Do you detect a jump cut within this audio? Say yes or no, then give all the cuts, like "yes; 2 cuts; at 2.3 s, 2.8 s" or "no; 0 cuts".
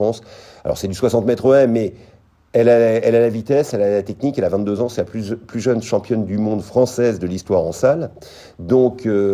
no; 0 cuts